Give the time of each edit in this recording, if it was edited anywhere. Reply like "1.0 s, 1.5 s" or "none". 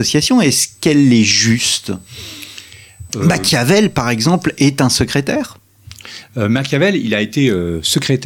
3.1 s